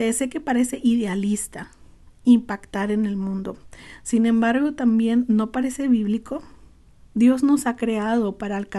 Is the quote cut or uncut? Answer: uncut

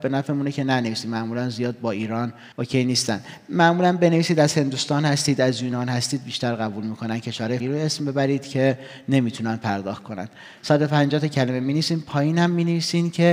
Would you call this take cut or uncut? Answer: cut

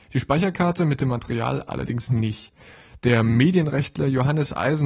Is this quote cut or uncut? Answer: cut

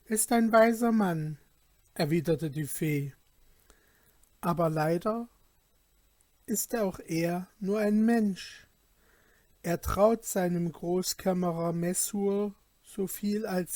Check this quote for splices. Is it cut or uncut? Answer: uncut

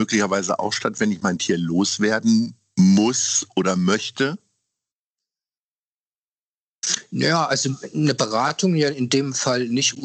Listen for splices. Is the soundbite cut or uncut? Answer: uncut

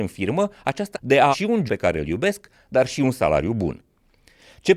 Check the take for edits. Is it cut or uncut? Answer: cut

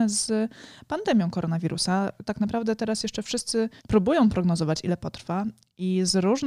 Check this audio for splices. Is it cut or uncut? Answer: cut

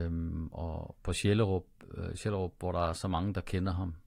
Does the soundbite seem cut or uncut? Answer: uncut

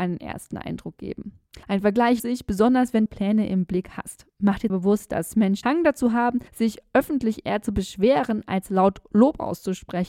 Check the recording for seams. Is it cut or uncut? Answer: cut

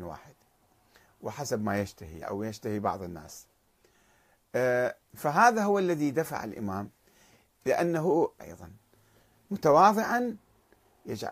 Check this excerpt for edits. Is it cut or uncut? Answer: cut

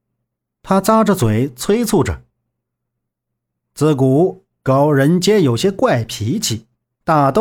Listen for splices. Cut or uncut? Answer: uncut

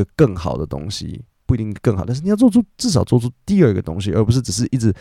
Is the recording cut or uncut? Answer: uncut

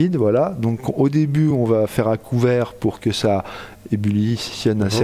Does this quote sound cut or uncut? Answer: uncut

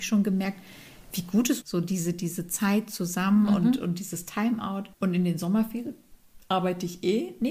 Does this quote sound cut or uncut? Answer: cut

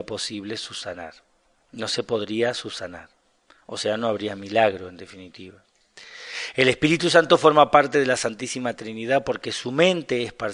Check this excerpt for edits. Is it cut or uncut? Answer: uncut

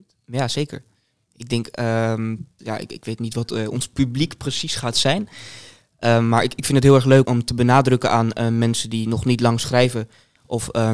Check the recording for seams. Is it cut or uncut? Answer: cut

